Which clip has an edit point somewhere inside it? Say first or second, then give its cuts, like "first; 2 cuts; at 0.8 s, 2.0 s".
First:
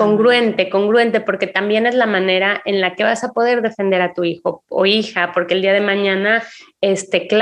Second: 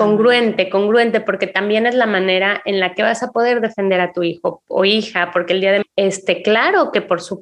second; 1 cut; at 5.8 s